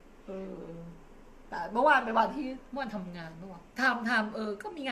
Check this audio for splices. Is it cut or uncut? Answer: cut